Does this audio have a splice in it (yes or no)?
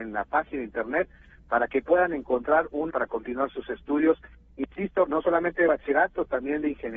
yes